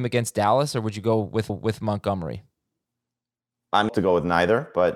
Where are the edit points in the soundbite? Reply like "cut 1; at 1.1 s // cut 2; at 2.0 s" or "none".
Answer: cut 1; at 1.5 s // cut 2; at 3.9 s